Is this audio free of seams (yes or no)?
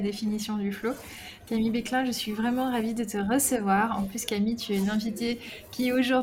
yes